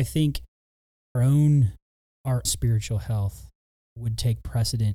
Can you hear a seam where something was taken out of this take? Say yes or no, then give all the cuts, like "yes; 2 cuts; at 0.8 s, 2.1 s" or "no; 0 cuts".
yes; 2 cuts; at 1.2 s, 2.5 s